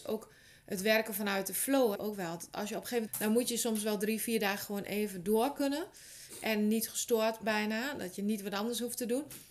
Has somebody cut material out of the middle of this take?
yes; 2 cuts; at 1.9 s, 3.1 s

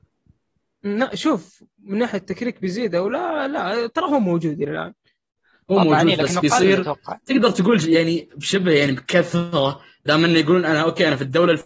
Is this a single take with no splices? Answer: yes; 0 cuts

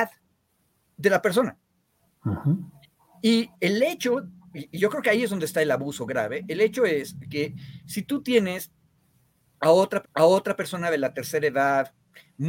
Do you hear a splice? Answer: yes; 1 cut; at 10.0 s

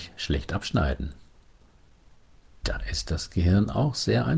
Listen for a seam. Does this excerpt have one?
no; 0 cuts

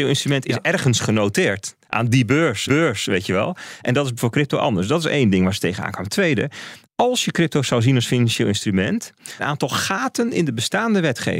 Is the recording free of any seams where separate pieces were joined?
no; 4 cuts; at 1.8 s, 2.7 s, 6.8 s, 9.4 s

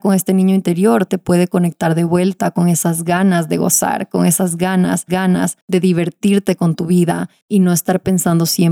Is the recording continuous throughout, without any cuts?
no; 2 cuts; at 1.1 s, 5.1 s

